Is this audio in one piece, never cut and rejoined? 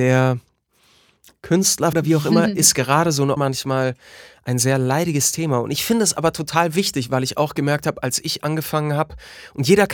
no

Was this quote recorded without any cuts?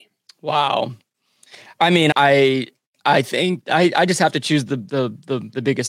no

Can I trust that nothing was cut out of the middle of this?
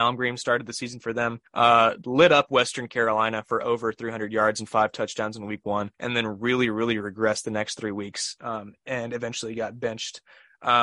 no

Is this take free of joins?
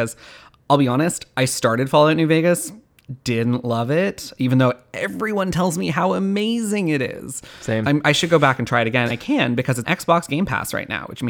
no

